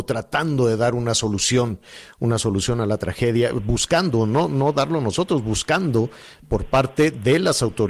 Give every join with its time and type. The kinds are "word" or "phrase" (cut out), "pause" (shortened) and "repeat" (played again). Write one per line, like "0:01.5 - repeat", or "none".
none

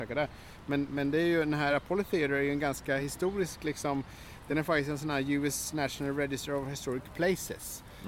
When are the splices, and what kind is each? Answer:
none

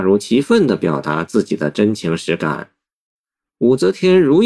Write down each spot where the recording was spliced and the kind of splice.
none

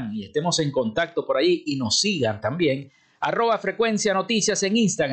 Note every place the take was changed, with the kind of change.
none

